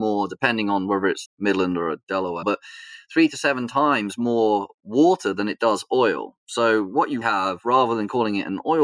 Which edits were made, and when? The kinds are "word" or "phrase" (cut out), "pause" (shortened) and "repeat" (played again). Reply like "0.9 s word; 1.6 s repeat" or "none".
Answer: 1.3 s word; 2.4 s word; 7.2 s word